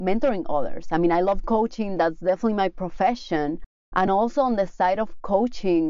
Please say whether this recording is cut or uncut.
uncut